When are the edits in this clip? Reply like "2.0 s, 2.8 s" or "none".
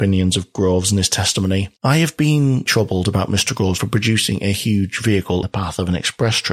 1.7 s, 2.7 s, 3.8 s, 5.4 s